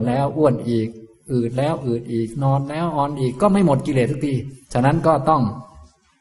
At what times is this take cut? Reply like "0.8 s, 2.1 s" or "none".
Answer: 4.6 s